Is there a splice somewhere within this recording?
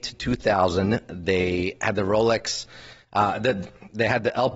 no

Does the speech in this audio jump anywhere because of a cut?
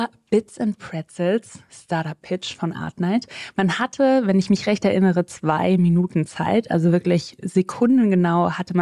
no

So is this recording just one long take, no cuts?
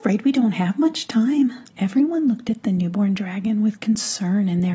no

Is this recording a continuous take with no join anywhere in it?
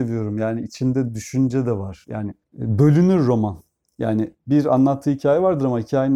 no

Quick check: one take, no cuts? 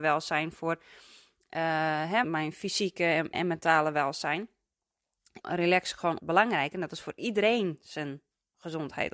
no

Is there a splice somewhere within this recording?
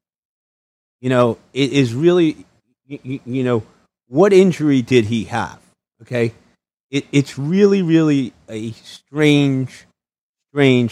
no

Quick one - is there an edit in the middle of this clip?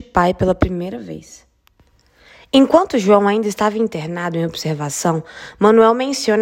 no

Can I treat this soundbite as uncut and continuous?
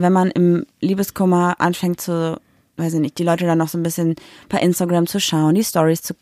yes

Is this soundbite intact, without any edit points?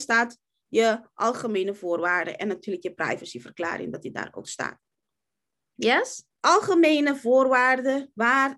no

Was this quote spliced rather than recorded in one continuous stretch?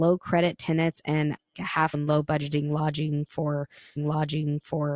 yes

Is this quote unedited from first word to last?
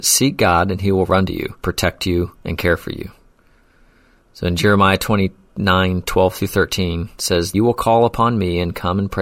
no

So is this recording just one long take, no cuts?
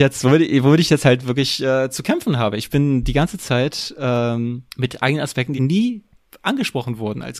no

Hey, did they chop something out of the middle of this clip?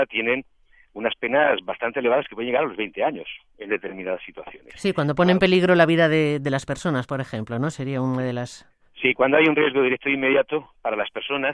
no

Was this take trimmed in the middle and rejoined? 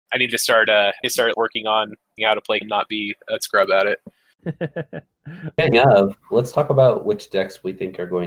yes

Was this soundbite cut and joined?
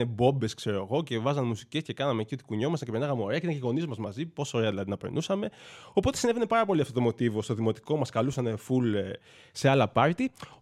no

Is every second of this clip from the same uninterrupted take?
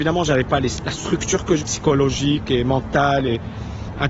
no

